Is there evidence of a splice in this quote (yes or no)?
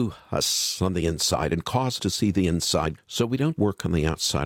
yes